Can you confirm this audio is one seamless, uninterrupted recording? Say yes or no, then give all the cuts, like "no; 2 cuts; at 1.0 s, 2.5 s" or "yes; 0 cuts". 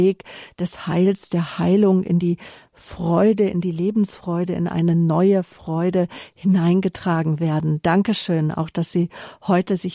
yes; 0 cuts